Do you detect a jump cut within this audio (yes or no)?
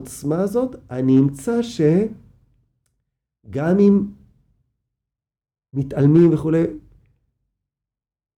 no